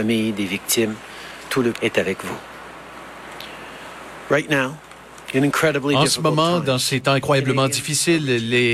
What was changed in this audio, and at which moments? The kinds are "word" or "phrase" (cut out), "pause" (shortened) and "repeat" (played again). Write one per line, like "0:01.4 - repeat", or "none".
0:01.7 - word